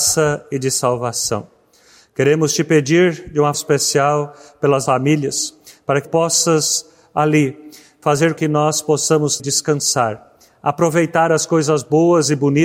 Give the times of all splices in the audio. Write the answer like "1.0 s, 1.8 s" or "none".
3.5 s, 4.9 s, 6.0 s, 8.4 s, 9.4 s